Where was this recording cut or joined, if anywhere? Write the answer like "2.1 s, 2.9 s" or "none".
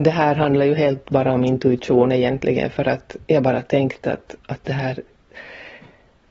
3.2 s, 4.4 s